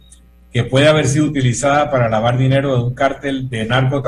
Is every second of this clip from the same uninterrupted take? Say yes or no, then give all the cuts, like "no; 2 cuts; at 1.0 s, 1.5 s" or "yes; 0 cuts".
yes; 0 cuts